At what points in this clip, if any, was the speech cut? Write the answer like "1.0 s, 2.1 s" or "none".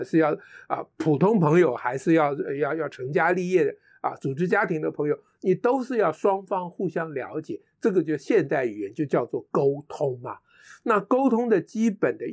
none